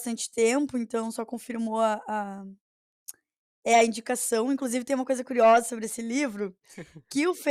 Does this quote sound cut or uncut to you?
uncut